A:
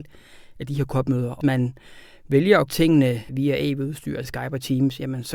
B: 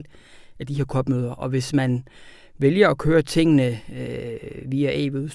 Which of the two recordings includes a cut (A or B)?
A